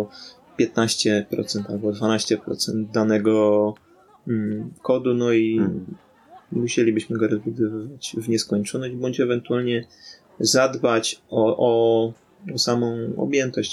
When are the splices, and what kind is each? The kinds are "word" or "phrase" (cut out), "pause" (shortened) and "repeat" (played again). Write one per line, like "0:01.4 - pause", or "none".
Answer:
none